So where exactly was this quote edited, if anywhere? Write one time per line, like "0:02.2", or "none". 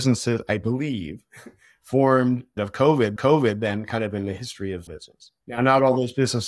0:02.6
0:03.2
0:04.9
0:05.4